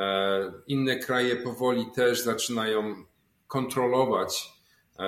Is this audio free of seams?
yes; 0 cuts

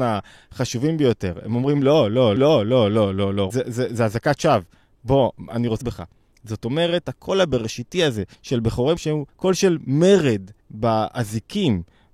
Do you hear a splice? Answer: yes; 8 cuts; at 2.4 s, 3.5 s, 5.8 s, 7.0 s, 8.3 s, 9.0 s, 9.3 s, 10.6 s

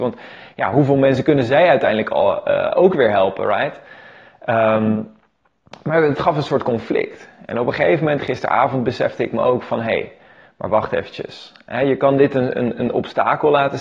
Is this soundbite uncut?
yes; 0 cuts

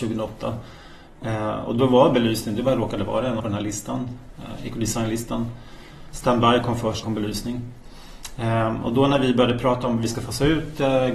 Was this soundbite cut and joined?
yes; 2 cuts; at 3.4 s, 7.0 s

